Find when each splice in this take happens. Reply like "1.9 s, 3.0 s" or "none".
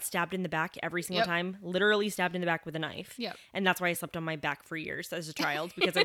none